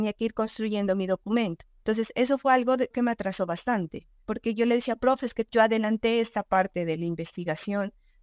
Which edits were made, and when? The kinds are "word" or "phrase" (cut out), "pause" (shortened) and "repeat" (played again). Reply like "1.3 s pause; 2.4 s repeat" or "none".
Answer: 2.9 s word